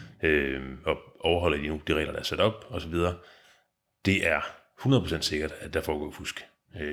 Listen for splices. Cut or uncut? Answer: uncut